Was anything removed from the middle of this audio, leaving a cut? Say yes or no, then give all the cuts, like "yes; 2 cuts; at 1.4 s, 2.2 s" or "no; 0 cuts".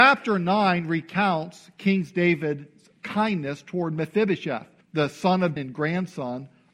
yes; 2 cuts; at 4.8 s, 5.6 s